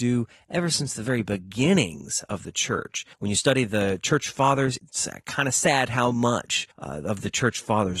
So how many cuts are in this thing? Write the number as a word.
three